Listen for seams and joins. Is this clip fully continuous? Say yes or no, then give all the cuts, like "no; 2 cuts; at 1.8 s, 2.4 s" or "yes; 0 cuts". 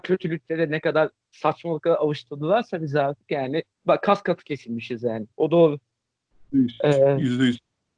no; 2 cuts; at 3.7 s, 5.3 s